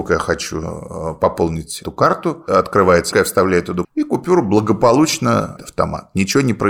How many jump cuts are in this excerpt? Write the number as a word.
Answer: four